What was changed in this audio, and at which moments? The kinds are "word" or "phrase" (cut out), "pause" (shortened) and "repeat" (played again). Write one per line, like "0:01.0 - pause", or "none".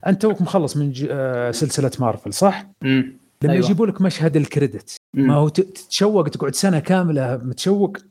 0:02.7 - pause